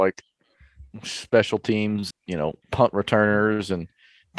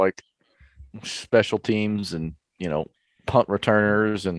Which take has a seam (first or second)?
first